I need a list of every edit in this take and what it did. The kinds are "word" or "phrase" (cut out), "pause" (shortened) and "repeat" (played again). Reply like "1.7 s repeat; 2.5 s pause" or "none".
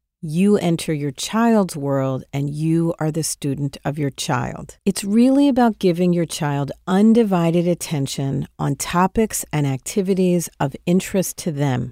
4.8 s pause